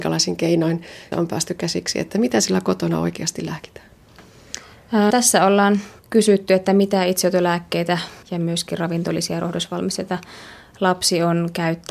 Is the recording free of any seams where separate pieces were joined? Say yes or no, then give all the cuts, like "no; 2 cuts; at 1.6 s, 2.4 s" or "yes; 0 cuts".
no; 4 cuts; at 1.1 s, 5.1 s, 6.0 s, 8.2 s